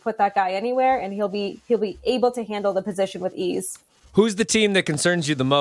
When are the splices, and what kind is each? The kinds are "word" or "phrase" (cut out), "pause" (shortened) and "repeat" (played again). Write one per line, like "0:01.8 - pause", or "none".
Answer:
none